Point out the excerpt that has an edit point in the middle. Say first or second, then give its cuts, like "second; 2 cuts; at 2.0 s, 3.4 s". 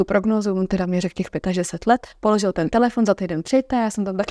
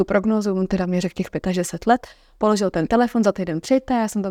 first; 1 cut; at 2.1 s